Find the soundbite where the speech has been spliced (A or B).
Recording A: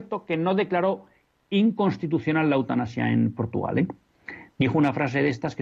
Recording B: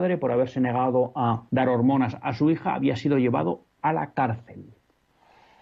B